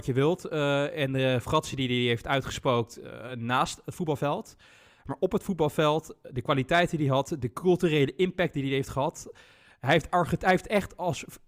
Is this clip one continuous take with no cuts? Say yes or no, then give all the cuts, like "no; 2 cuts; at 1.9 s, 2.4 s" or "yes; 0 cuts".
yes; 0 cuts